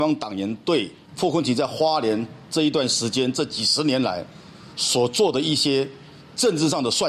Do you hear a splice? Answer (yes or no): yes